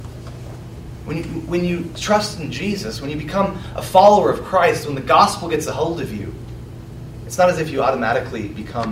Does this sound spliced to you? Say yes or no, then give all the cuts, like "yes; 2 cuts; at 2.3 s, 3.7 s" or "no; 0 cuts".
no; 0 cuts